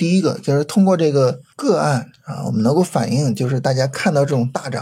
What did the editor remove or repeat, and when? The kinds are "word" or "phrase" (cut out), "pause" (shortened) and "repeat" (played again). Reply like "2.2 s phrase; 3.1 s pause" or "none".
1.5 s pause